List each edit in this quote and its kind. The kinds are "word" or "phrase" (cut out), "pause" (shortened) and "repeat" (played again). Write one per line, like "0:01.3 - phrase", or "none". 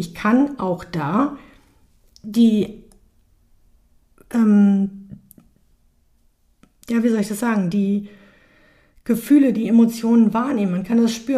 none